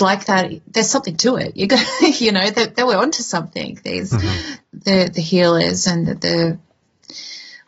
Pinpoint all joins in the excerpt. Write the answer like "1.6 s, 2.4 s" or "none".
5.1 s